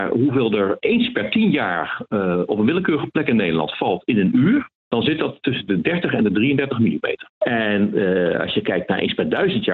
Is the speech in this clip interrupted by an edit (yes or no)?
yes